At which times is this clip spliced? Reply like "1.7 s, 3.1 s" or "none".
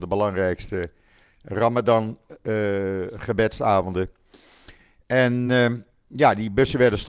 none